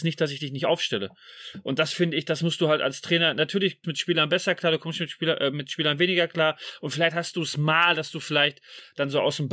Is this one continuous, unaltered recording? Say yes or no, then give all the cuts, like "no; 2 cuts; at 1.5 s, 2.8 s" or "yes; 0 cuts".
no; 1 cut; at 3.8 s